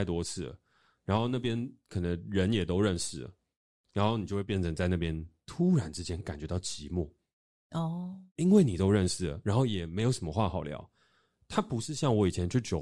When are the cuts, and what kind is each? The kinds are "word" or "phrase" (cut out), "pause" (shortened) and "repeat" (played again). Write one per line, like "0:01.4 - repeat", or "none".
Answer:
none